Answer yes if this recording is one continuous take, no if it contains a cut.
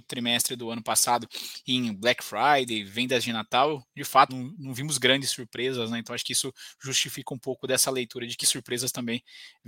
no